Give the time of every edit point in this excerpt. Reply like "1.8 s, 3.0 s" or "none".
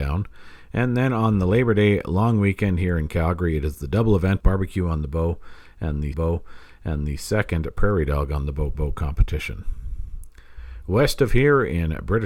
4.4 s, 6.1 s, 8.7 s